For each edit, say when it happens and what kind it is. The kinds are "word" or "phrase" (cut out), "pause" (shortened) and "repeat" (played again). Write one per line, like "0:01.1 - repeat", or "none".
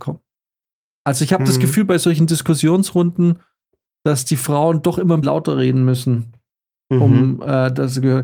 0:05.2 - word

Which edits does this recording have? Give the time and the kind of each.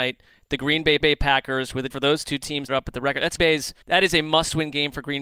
0:01.0 - repeat
0:01.9 - word
0:02.7 - phrase
0:03.4 - word
0:03.8 - pause

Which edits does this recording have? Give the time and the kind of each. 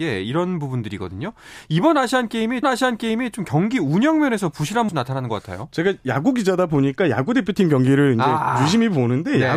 0:02.6 - repeat
0:04.9 - phrase

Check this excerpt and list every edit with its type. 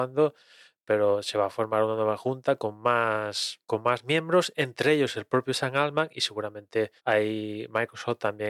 0:03.6 - pause
0:07.0 - pause

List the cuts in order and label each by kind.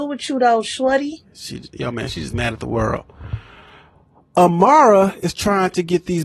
none

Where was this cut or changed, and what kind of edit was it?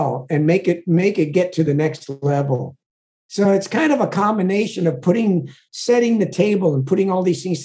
none

